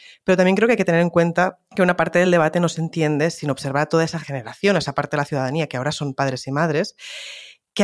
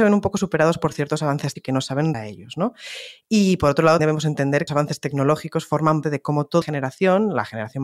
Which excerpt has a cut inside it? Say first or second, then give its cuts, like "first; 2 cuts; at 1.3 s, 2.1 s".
second; 6 cuts; at 1.6 s, 2.1 s, 4.0 s, 4.7 s, 6.0 s, 6.6 s